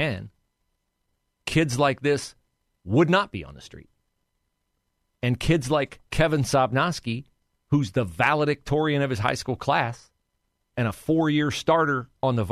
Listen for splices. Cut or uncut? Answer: uncut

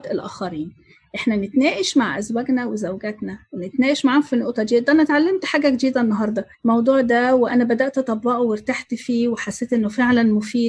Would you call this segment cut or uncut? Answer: cut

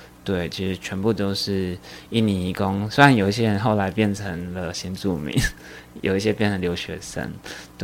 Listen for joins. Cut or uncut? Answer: uncut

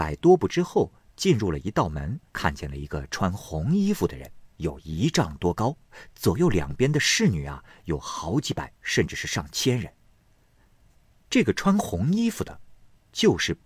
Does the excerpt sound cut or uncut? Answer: cut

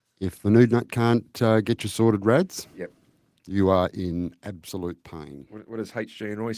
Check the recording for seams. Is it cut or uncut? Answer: uncut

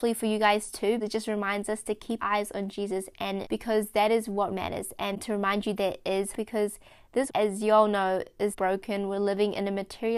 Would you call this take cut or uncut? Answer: cut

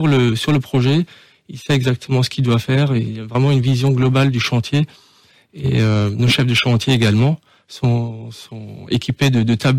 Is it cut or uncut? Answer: uncut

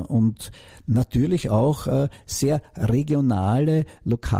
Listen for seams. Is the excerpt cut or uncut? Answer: uncut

